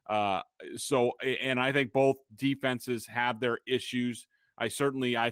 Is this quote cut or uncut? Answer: uncut